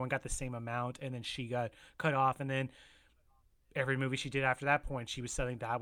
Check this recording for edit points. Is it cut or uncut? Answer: uncut